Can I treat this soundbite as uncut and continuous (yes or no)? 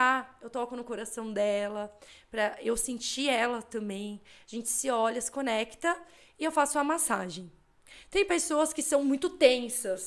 yes